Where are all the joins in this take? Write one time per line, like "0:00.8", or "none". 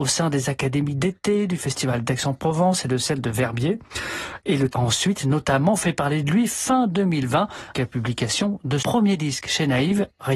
0:04.7
0:07.7
0:08.8